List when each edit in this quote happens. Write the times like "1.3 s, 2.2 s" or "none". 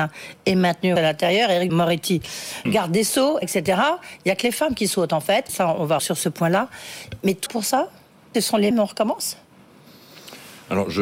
1.0 s, 1.7 s, 2.7 s, 3.4 s, 5.5 s, 6.0 s, 7.5 s, 8.3 s, 8.7 s